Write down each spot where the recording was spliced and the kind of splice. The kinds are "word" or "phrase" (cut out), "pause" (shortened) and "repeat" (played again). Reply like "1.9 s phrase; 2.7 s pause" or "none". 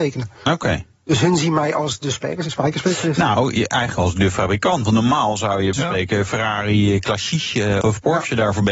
5.7 s word; 7.8 s word